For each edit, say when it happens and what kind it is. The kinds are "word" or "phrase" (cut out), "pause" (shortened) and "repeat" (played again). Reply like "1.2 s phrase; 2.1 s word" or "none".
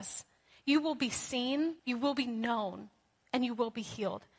1.8 s pause